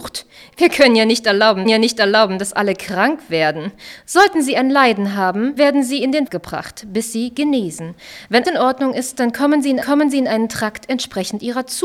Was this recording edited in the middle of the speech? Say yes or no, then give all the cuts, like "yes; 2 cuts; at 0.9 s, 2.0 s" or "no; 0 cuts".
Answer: yes; 5 cuts; at 1.6 s, 5.6 s, 6.3 s, 8.4 s, 9.8 s